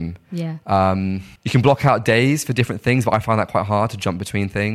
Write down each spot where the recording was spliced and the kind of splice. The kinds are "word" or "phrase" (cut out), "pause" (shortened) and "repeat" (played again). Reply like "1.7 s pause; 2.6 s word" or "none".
1.4 s pause